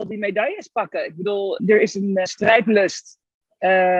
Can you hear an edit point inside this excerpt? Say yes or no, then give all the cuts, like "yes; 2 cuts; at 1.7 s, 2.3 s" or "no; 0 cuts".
yes; 2 cuts; at 1.6 s, 2.3 s